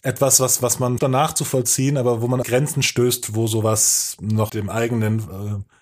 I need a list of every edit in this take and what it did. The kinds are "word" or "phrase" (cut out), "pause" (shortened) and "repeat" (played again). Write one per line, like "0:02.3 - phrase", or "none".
0:01.0 - word
0:02.4 - phrase
0:04.5 - phrase